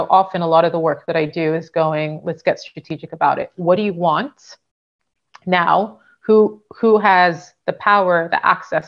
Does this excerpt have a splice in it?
no; 0 cuts

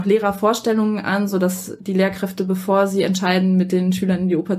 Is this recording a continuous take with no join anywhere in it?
yes; 0 cuts

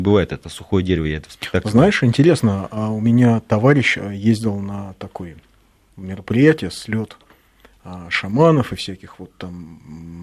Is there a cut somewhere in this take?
no; 0 cuts

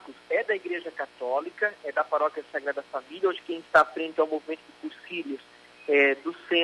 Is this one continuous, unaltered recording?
yes; 0 cuts

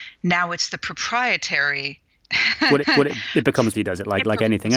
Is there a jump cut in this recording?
yes; 2 cuts; at 2.8 s, 3.7 s

